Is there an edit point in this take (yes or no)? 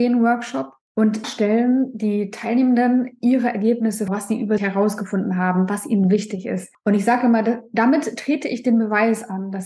yes